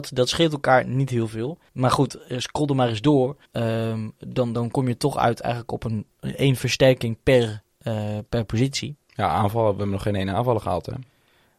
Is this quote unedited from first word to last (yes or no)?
no